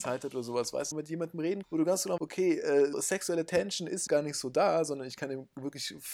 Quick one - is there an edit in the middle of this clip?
yes; 5 cuts; at 0.9 s, 1.6 s, 2.2 s, 2.9 s, 4.1 s

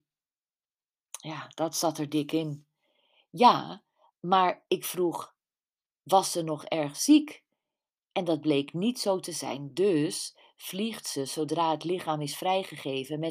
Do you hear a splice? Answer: no; 0 cuts

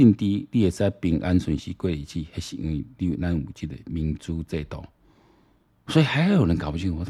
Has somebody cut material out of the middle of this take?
no; 0 cuts

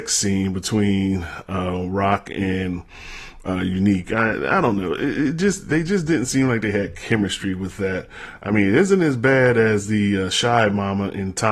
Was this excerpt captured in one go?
yes; 0 cuts

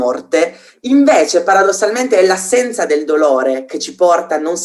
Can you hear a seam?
no; 0 cuts

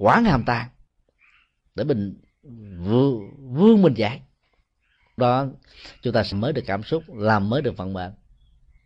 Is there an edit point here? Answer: yes; 2 cuts; at 5.2 s, 6.3 s

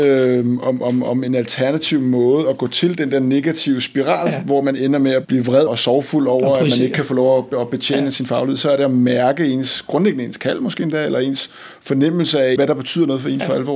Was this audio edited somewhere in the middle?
yes; 3 cuts; at 5.2 s, 5.7 s, 12.6 s

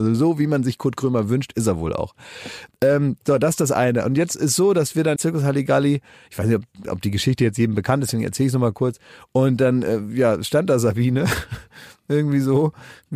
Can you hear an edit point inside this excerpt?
yes; 1 cut; at 5.2 s

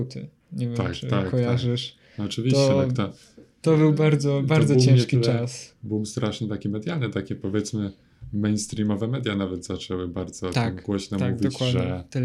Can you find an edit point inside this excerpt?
no; 0 cuts

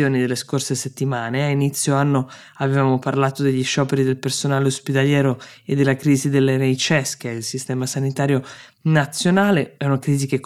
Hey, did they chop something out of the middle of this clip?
no; 0 cuts

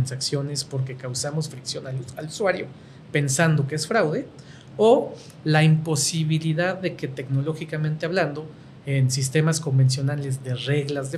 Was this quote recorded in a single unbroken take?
yes; 0 cuts

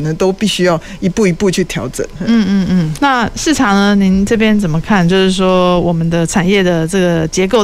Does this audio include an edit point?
yes; 1 cut; at 3.0 s

